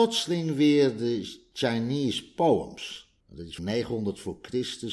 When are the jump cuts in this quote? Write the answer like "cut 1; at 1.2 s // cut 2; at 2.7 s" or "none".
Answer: cut 1; at 3.2 s // cut 2; at 3.6 s

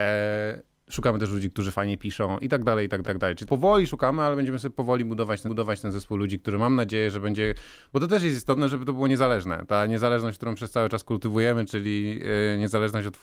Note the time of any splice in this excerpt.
cut 1; at 3.0 s // cut 2; at 3.5 s // cut 3; at 5.4 s

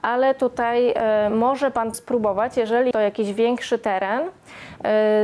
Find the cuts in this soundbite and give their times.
cut 1; at 1.9 s // cut 2; at 2.9 s

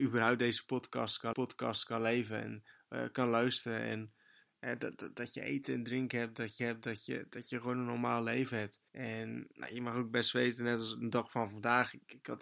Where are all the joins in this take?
cut 1; at 1.3 s // cut 2; at 6.6 s // cut 3; at 8.9 s

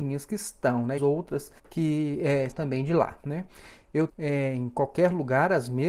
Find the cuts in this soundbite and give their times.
cut 1; at 1.0 s // cut 2; at 1.6 s // cut 3; at 2.5 s // cut 4; at 3.2 s // cut 5; at 4.1 s

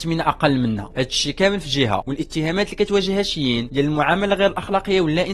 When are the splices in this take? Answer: none

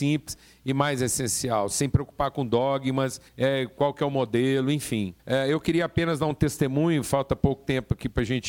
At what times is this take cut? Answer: cut 1; at 3.3 s // cut 2; at 5.2 s

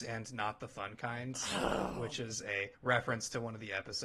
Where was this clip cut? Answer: cut 1; at 2.7 s

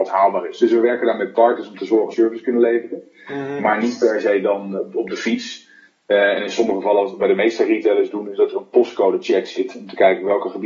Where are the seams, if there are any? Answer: cut 1; at 2.1 s // cut 2; at 4.8 s

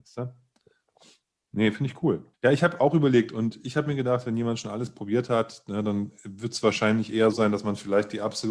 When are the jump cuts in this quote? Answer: cut 1; at 2.3 s // cut 2; at 7.3 s

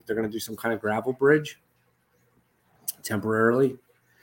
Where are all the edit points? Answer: none

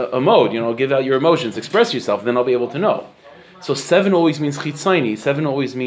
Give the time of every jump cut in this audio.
none

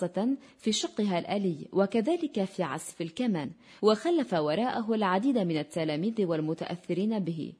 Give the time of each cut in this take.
none

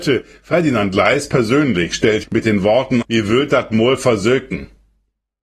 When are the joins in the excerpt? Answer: cut 1; at 2.2 s // cut 2; at 3.0 s

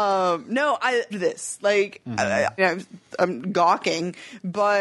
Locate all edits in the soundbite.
cut 1; at 1.1 s // cut 2; at 2.6 s

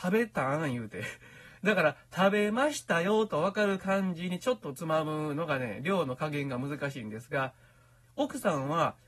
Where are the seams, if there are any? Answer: cut 1; at 8.0 s

